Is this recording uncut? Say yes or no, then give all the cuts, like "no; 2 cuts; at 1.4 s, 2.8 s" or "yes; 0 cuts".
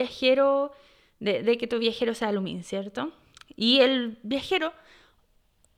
yes; 0 cuts